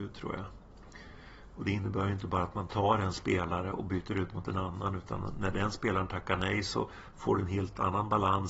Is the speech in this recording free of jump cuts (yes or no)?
yes